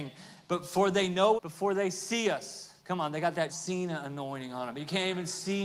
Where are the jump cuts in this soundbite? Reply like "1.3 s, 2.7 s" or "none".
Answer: 1.4 s, 2.8 s, 3.5 s